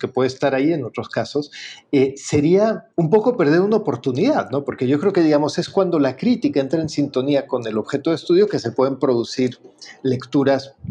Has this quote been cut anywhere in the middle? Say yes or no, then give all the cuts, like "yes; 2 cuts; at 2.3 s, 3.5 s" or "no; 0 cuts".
yes; 1 cut; at 2.9 s